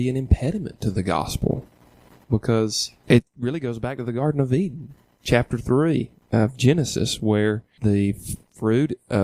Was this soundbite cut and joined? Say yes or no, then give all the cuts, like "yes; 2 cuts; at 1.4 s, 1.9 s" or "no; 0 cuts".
no; 0 cuts